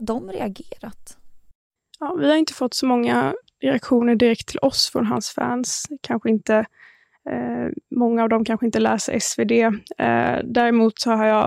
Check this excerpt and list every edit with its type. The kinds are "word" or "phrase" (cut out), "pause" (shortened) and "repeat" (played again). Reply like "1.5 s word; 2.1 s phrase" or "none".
none

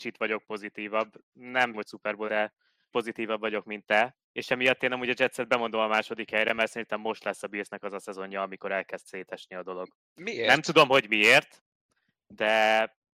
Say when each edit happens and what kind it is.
1.7 s word; 2.3 s word; 2.9 s word; 4.2 s pause

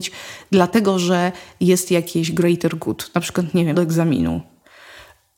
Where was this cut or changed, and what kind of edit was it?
3.7 s word

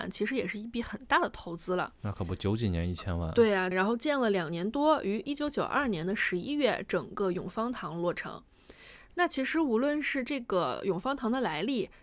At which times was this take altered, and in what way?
3.7 s phrase

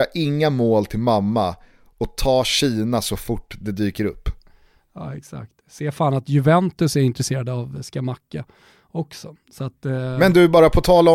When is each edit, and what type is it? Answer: none

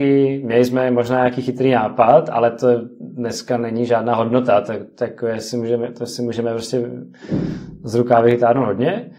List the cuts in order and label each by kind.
none

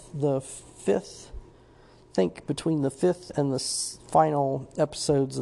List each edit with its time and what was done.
none

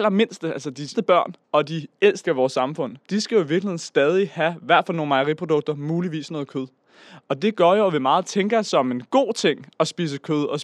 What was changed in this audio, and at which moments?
0.9 s word; 1.4 s pause; 2.2 s word; 3.0 s pause

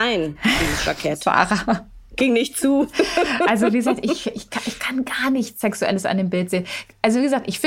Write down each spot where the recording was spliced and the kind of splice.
none

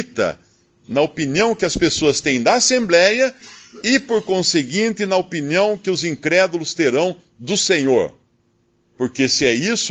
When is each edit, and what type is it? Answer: none

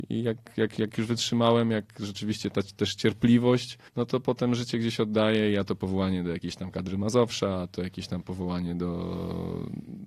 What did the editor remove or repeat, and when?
3.9 s pause

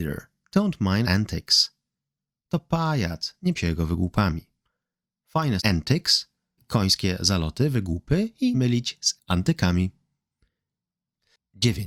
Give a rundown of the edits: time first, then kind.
1.0 s word; 3.6 s word; 5.6 s word; 6.6 s word; 8.5 s word; 9.2 s word

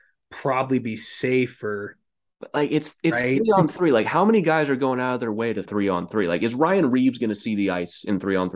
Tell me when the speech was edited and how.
5.7 s phrase

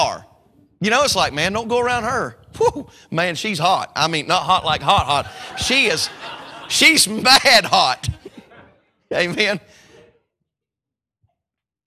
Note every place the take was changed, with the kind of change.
none

